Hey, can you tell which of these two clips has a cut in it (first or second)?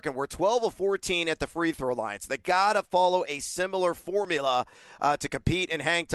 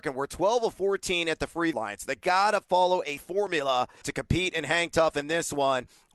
second